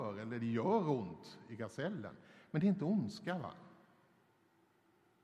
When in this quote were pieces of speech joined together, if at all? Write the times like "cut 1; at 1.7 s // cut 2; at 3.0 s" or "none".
none